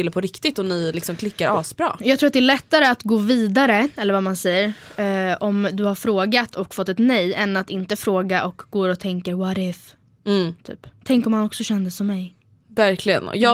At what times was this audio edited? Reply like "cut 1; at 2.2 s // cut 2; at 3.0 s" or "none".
none

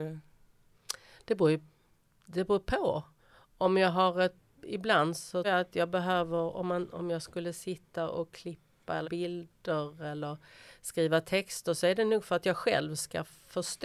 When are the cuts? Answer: cut 1; at 5.4 s // cut 2; at 9.0 s

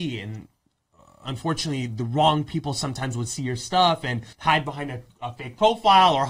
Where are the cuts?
cut 1; at 4.3 s

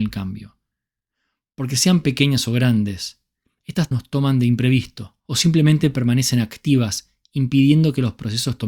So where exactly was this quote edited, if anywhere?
cut 1; at 3.9 s // cut 2; at 5.2 s

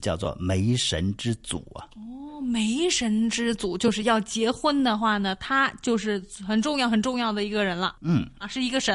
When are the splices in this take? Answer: cut 1; at 1.9 s // cut 2; at 8.0 s

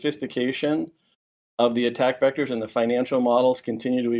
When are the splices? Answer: none

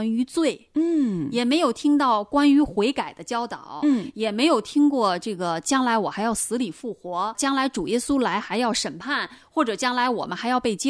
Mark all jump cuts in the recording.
cut 1; at 7.3 s

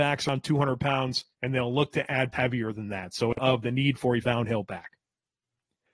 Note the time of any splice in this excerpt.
cut 1; at 1.3 s // cut 2; at 2.3 s // cut 3; at 3.4 s // cut 4; at 4.2 s

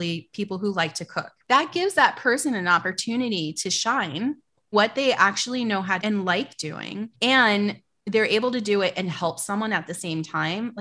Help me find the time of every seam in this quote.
cut 1; at 4.7 s // cut 2; at 6.0 s // cut 3; at 7.1 s

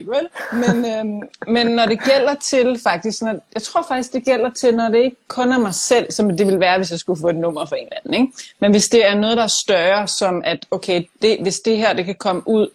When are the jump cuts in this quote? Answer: none

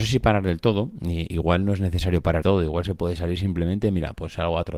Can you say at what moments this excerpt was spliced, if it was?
cut 1; at 2.4 s

